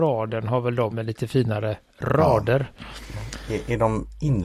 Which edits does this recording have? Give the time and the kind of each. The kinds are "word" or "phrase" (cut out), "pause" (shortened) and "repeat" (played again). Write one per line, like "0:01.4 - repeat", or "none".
0:00.9 - word